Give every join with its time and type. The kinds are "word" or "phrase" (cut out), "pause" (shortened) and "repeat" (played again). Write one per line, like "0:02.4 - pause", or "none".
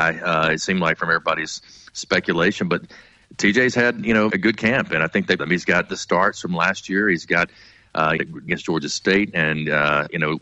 0:04.3 - word
0:05.4 - phrase
0:08.2 - phrase
0:08.5 - word